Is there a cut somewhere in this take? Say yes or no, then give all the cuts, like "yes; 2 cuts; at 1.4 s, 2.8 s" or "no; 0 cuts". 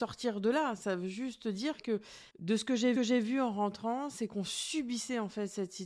yes; 2 cuts; at 2.3 s, 3.0 s